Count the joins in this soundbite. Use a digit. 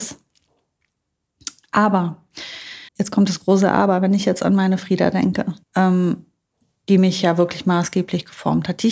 2